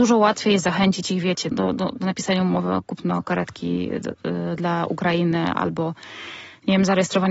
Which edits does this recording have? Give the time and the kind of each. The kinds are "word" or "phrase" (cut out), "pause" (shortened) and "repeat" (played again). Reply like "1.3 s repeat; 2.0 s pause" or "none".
1.5 s word